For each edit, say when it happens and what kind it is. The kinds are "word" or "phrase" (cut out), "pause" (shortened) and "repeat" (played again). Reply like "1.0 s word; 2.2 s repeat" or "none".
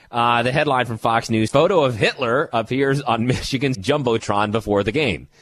1.5 s word; 3.7 s word